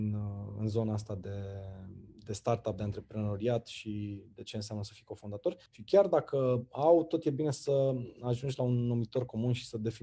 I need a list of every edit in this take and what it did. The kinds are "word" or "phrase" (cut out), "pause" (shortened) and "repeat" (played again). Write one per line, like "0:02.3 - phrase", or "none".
0:05.7 - pause